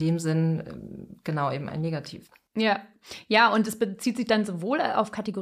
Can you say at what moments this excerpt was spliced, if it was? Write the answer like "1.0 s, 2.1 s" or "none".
none